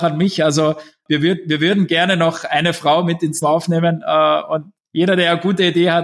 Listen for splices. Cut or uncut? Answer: cut